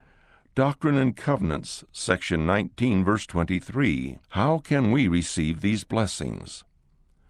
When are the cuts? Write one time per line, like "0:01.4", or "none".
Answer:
0:04.2